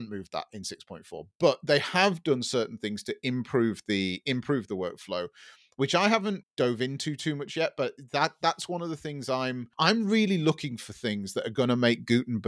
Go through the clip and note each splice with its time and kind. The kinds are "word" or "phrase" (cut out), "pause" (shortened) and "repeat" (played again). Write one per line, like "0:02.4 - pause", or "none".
0:06.4 - word
0:09.7 - pause